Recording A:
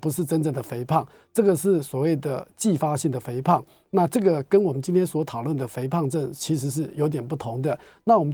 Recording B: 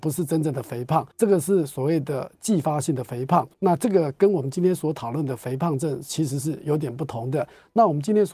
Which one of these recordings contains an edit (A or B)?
B